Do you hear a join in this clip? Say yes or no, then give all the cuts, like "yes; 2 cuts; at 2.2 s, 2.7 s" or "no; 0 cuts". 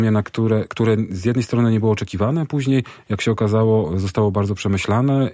no; 0 cuts